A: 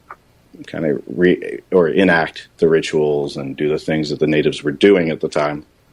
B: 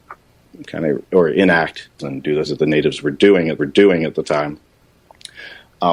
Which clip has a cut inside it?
B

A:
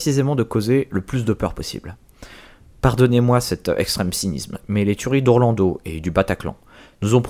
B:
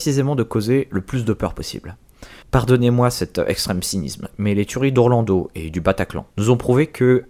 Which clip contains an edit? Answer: B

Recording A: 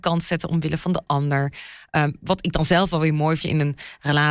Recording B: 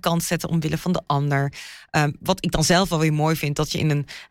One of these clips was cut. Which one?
A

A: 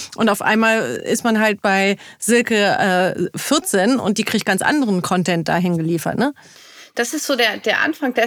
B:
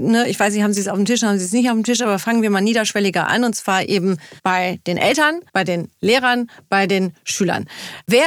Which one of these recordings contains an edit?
B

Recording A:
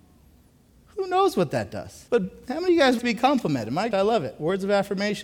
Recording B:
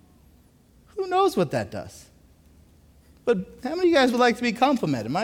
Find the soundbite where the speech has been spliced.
A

